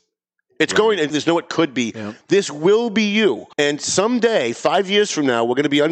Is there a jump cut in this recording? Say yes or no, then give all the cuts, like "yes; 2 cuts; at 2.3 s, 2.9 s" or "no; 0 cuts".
yes; 2 cuts; at 1.1 s, 3.5 s